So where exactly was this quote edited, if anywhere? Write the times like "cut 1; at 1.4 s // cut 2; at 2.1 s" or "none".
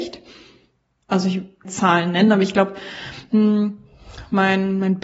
cut 1; at 1.6 s